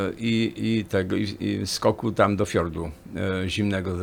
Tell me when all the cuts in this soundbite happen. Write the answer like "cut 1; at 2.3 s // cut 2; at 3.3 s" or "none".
none